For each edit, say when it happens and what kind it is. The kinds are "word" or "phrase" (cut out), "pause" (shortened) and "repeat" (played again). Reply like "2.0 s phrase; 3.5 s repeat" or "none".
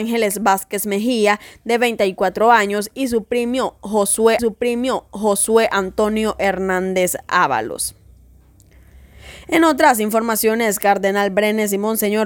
4.4 s repeat

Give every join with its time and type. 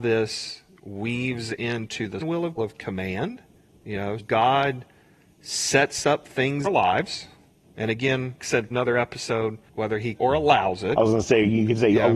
2.2 s word; 2.6 s phrase; 3.6 s pause; 4.2 s word; 6.6 s phrase; 8.4 s word; 8.7 s word; 9.7 s pause; 10.2 s phrase

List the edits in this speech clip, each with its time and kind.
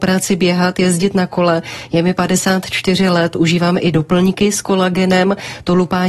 none

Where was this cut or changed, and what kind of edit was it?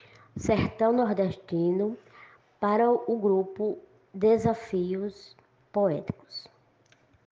none

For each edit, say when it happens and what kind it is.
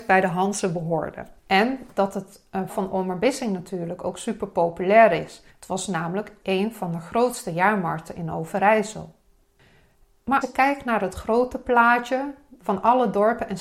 1.4 s pause; 2.7 s word; 5.5 s pause; 6.4 s word; 10.4 s word; 12.6 s word

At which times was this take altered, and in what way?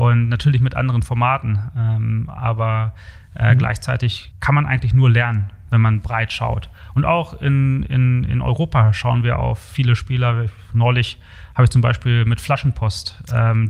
none

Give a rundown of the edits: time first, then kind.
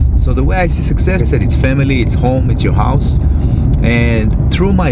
1.2 s word

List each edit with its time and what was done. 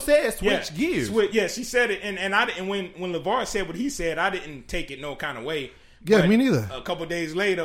none

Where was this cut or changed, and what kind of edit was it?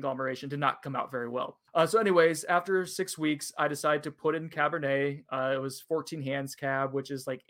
1.7 s pause

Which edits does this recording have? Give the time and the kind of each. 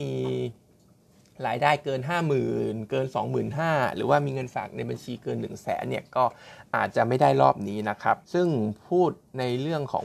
8.2 s pause

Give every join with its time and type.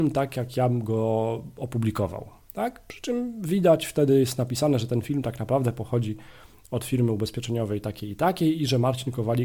none

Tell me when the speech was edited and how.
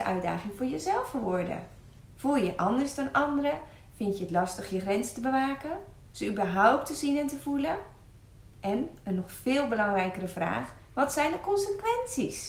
6.1 s pause

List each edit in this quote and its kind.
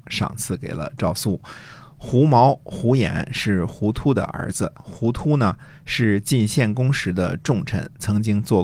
4.7 s pause

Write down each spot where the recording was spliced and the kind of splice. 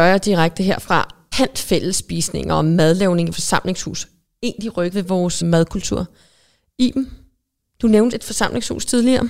1.3 s word; 3.3 s word; 4.9 s word; 5.4 s word; 8.1 s word

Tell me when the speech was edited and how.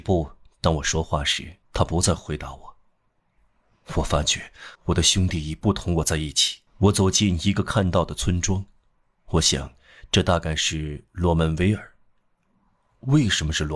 1.6 s pause; 4.8 s pause; 6.7 s pause

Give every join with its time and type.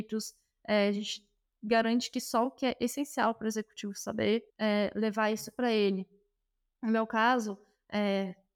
4.5 s pause

